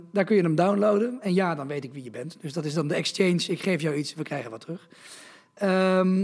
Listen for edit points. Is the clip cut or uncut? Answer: uncut